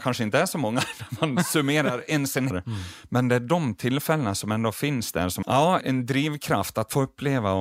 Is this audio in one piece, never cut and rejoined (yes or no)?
no